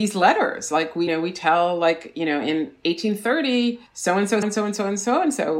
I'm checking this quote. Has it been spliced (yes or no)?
yes